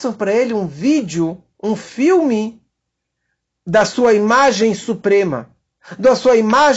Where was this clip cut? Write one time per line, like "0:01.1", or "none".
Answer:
none